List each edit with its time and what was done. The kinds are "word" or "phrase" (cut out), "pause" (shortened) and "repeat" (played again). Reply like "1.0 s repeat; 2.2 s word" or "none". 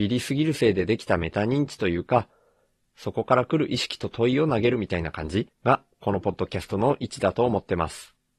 5.5 s pause

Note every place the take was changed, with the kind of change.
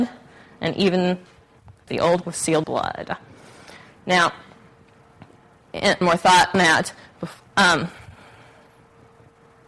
1.9 s word; 2.2 s word; 2.6 s phrase; 6.0 s word; 6.5 s word

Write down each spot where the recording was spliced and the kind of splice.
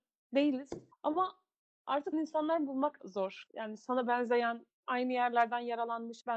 0.9 s pause; 2.1 s word; 3.0 s word; 4.8 s pause

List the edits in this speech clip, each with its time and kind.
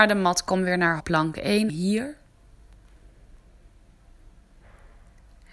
1.0 s word; 1.7 s word

